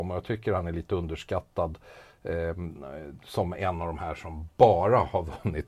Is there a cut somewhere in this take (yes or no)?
no